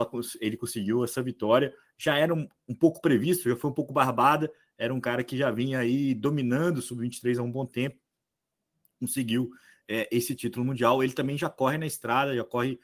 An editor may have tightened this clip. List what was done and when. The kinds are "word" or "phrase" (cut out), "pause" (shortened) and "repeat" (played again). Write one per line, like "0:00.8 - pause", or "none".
none